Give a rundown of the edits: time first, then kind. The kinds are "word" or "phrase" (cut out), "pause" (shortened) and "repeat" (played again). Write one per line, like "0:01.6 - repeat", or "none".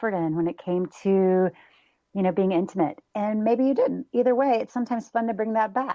none